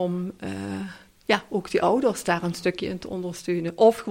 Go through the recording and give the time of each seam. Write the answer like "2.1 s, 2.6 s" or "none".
none